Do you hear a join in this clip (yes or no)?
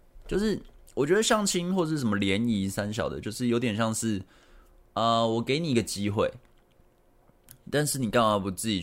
no